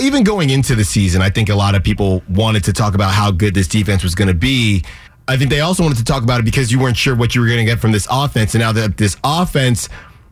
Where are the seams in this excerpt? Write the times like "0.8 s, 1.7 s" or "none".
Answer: 5.1 s

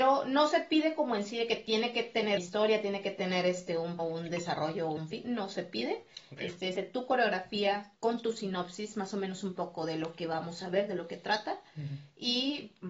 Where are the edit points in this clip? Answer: 2.4 s, 4.0 s, 5.0 s, 6.7 s, 8.0 s

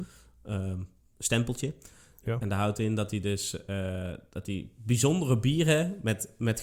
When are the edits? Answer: none

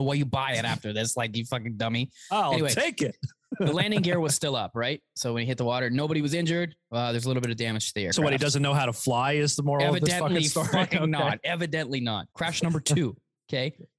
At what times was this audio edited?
12.3 s

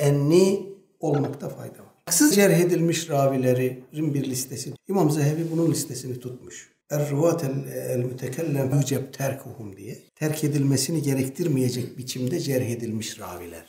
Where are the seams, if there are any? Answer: 2.3 s, 4.8 s, 6.8 s, 8.7 s, 10.1 s

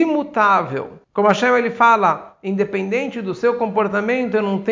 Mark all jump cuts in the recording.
1.0 s

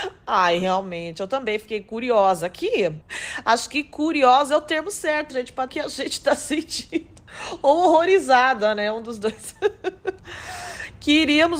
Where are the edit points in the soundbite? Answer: 5.3 s, 5.7 s

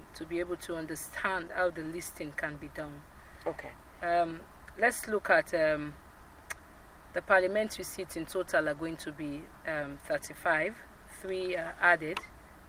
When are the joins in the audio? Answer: none

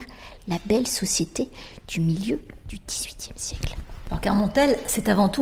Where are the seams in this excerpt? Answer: none

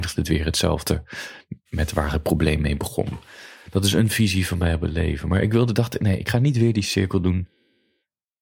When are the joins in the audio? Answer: 1.6 s

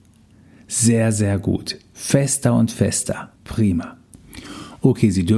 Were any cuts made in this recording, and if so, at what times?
3.3 s

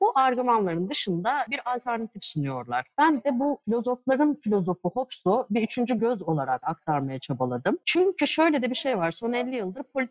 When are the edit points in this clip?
none

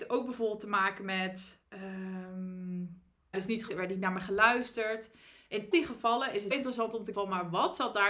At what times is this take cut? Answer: 3.3 s, 3.7 s, 5.7 s, 6.5 s, 7.1 s

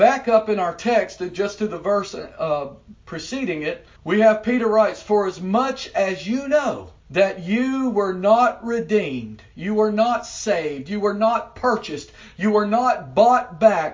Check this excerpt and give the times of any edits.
4.0 s, 7.0 s

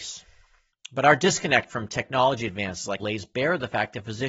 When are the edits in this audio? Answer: 3.0 s

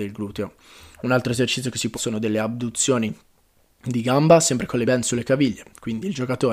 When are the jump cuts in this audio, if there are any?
1.9 s, 4.8 s

